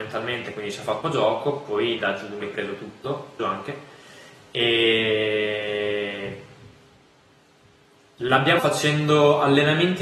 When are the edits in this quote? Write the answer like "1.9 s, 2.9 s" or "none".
1.0 s, 2.0 s, 2.4 s, 3.4 s, 8.6 s